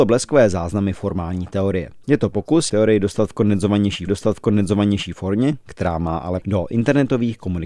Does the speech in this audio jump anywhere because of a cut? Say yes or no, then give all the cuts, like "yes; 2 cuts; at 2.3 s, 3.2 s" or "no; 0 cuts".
yes; 4 cuts; at 2.0 s, 2.7 s, 4.1 s, 6.4 s